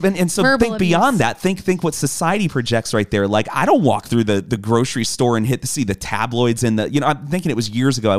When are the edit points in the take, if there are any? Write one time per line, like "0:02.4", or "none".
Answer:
none

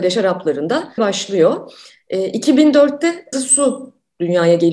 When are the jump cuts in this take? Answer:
0:01.0
0:03.3

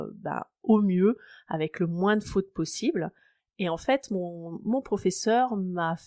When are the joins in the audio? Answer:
0:03.4

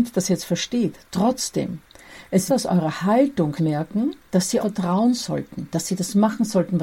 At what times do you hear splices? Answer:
0:02.5
0:03.6
0:04.6

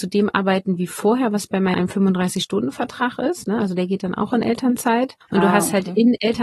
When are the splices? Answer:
0:01.7
0:05.2

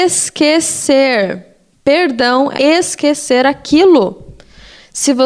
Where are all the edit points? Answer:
0:01.7
0:02.6

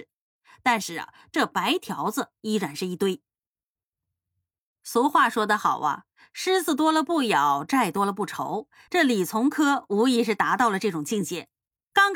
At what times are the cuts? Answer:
none

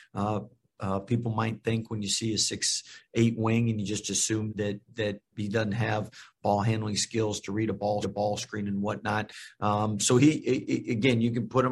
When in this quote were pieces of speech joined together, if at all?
0:04.5
0:08.0

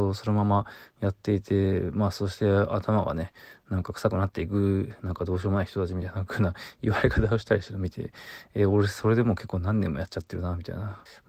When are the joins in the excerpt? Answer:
none

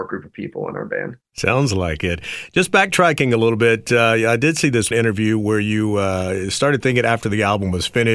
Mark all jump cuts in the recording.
0:04.9

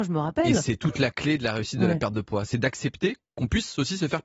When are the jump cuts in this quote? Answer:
none

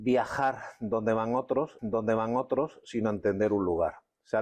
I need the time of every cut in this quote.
0:01.8

